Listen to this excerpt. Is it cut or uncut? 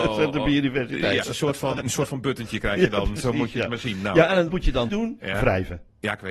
cut